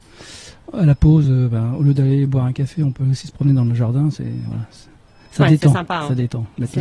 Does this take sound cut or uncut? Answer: uncut